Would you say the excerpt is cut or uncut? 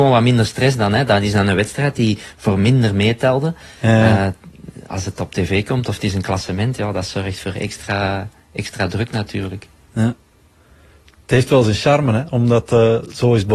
uncut